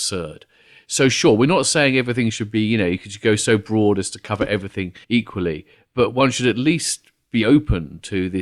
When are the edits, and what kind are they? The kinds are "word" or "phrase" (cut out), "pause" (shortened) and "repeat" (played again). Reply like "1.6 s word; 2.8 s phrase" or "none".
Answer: 5.0 s pause